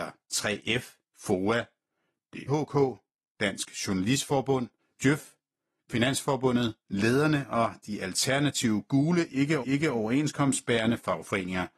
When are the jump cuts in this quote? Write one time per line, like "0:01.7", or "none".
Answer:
0:01.0
0:02.5
0:04.8
0:09.6